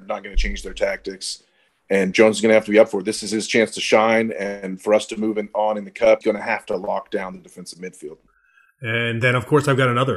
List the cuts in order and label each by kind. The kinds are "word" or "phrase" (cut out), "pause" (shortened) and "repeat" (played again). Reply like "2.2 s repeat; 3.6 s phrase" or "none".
2.1 s word; 6.2 s word